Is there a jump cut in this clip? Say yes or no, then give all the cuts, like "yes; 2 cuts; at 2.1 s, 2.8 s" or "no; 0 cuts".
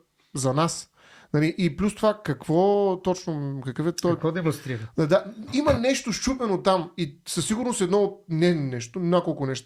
yes; 1 cut; at 5.5 s